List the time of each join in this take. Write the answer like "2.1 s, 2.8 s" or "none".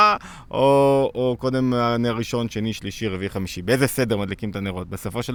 none